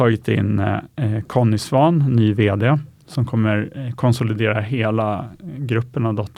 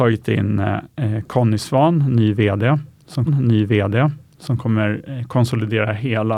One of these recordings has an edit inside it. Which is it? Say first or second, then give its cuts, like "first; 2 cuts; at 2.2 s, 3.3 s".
second; 1 cut; at 3.3 s